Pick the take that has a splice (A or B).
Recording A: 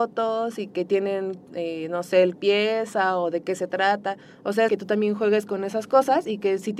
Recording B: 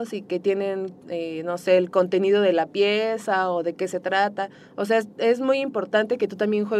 A